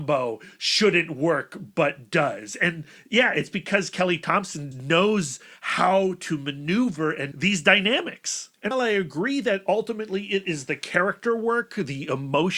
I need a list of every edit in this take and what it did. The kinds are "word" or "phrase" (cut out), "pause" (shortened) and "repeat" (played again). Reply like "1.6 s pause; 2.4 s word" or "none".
4.7 s word; 7.3 s word; 8.7 s word